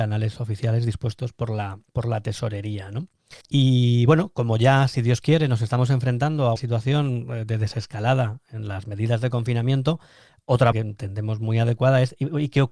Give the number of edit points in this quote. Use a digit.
4